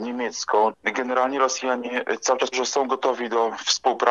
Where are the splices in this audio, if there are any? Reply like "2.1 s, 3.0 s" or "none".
2.5 s